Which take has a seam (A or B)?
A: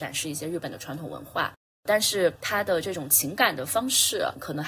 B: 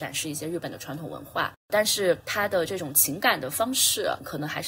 B